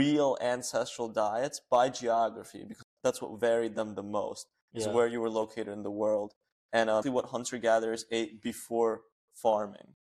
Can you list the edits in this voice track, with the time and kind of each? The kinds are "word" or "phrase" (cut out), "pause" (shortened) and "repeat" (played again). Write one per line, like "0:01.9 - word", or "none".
0:02.8 - word
0:07.0 - word